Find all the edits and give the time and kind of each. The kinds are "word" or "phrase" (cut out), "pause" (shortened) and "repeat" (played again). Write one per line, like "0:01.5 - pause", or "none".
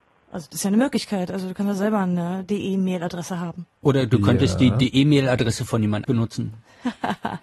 0:03.8 - pause
0:06.0 - word